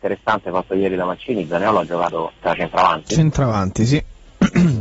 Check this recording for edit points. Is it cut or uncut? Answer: cut